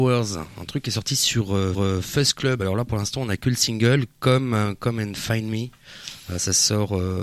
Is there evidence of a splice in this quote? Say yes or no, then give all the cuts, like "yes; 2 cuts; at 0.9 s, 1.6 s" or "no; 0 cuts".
yes; 1 cut; at 1.7 s